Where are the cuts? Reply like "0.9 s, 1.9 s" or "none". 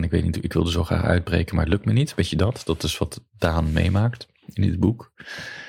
4.4 s